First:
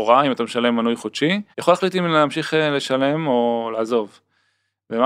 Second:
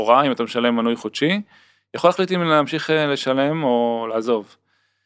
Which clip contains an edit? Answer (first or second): first